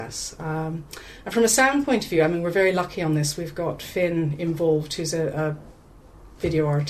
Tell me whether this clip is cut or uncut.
uncut